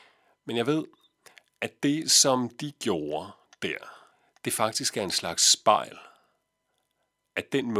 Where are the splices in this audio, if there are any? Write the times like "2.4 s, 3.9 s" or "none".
4.1 s